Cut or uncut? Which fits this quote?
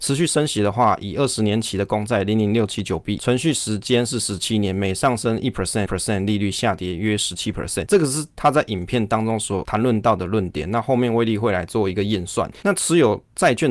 cut